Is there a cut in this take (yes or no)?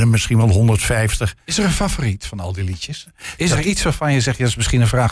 no